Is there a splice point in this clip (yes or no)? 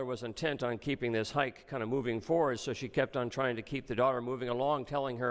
no